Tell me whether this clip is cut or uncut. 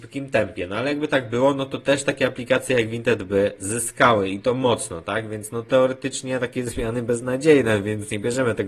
uncut